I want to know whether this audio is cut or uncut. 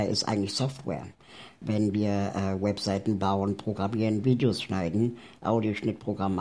uncut